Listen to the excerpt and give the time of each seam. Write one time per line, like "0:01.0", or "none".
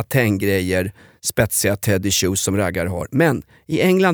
none

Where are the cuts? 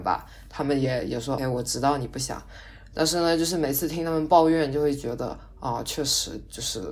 0:01.4

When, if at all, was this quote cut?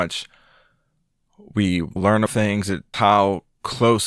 0:02.0
0:02.3
0:02.9

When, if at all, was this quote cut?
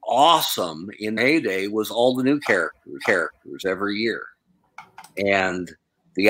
0:01.2
0:03.0

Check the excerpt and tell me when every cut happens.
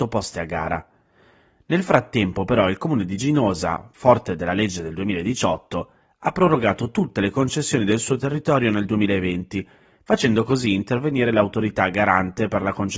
none

